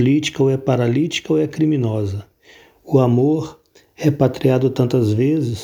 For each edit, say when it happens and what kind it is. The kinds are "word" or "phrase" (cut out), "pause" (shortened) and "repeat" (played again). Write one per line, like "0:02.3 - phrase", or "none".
none